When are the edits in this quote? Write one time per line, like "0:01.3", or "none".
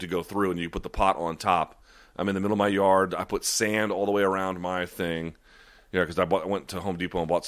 none